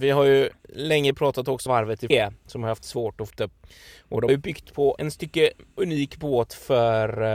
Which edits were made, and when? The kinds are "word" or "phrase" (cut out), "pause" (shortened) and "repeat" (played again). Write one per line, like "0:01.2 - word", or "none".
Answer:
0:01.7 - phrase
0:02.1 - phrase
0:03.3 - word
0:04.3 - word
0:05.0 - word